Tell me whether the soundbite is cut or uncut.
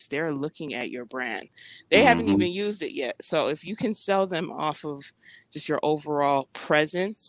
uncut